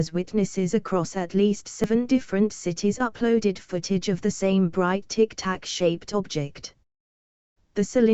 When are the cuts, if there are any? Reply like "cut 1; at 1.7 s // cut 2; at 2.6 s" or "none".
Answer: none